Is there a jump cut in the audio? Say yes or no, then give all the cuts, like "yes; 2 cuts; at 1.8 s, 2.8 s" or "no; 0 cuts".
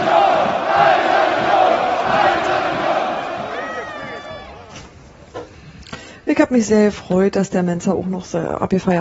no; 0 cuts